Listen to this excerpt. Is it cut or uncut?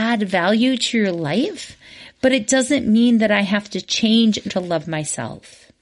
cut